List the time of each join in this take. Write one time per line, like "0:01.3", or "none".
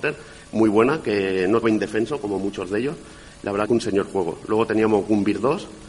0:01.6
0:03.7